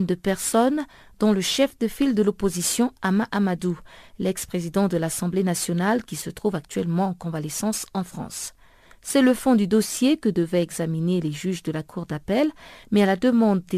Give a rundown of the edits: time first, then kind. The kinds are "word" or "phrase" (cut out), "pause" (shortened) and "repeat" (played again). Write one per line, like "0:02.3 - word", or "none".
none